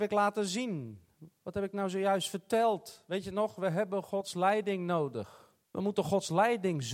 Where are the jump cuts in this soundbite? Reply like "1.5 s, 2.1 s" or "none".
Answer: 5.6 s